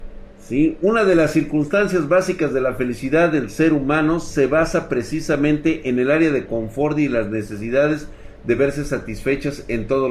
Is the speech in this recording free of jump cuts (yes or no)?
yes